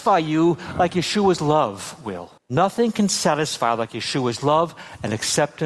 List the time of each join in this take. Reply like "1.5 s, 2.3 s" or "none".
2.4 s